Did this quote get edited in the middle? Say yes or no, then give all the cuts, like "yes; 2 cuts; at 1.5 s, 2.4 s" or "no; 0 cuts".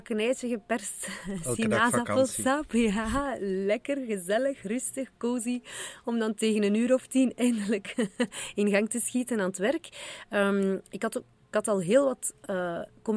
no; 0 cuts